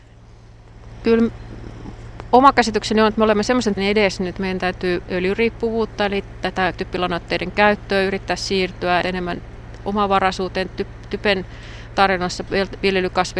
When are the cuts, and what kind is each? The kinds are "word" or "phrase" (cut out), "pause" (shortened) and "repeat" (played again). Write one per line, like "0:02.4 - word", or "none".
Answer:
0:03.8 - word
0:04.3 - word
0:05.1 - word
0:06.7 - word
0:09.0 - word
0:10.7 - word